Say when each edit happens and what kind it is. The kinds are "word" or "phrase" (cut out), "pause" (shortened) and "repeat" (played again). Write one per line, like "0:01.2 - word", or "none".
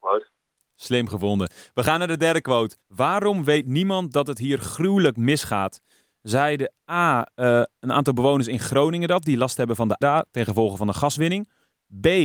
0:02.8 - pause
0:10.0 - word